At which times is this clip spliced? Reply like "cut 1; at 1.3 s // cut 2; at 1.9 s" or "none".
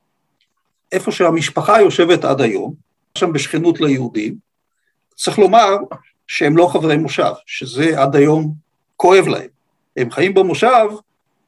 cut 1; at 3.2 s